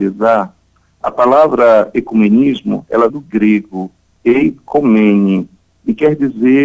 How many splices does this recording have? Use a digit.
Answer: 1